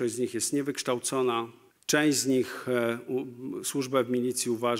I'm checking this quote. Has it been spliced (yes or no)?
yes